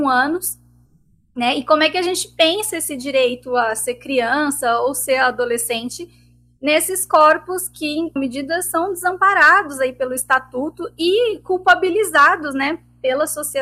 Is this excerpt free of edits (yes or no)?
no